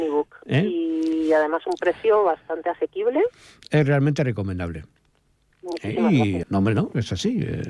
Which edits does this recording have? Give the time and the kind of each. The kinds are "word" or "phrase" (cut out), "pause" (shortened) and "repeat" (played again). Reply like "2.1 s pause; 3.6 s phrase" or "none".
6.4 s phrase